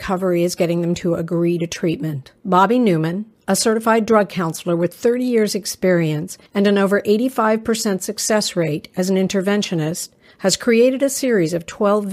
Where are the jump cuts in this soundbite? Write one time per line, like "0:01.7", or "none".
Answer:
0:02.4
0:06.5
0:10.3